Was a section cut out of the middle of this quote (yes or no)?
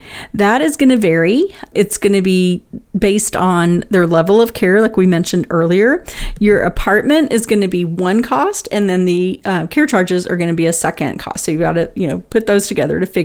yes